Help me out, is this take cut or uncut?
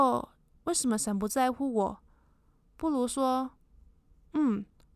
uncut